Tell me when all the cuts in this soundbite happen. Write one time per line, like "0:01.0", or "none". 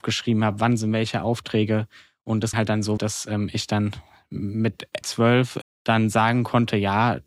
0:02.5
0:03.0
0:05.0
0:05.6

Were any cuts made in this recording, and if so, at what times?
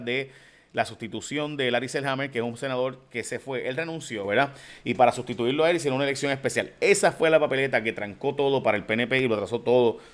none

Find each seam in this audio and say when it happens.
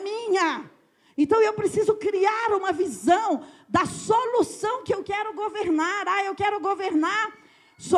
none

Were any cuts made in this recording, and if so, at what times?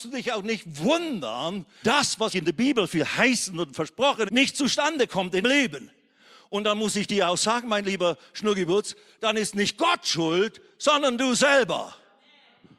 0:01.8
0:02.3
0:04.3
0:05.4

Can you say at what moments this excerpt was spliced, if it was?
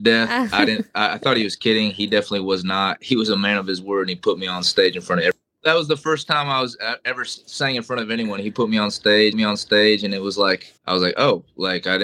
0:09.3
0:10.8

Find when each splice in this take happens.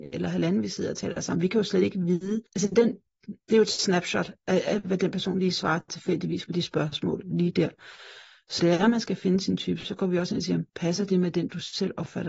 0:02.5
0:08.6
0:10.7

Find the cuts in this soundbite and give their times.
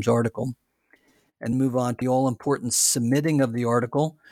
0:01.5
0:02.0

